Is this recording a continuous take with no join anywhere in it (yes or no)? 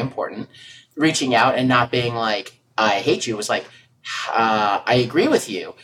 yes